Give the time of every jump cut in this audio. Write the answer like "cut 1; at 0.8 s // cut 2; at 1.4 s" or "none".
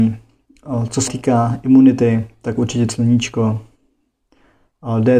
cut 1; at 1.1 s // cut 2; at 2.9 s